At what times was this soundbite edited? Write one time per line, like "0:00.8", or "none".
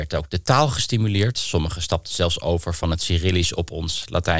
none